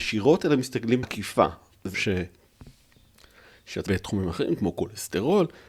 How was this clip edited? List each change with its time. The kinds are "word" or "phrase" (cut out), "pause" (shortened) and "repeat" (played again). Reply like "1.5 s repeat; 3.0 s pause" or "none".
1.0 s word; 1.9 s word; 3.9 s phrase